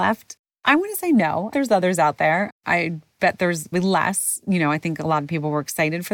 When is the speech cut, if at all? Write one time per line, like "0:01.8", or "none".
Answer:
0:01.5
0:03.7